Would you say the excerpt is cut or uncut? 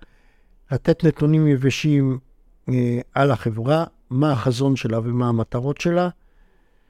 uncut